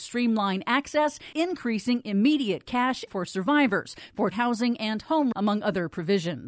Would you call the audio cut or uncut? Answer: cut